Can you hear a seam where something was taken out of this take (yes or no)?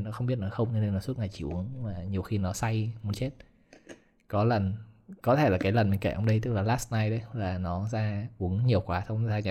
no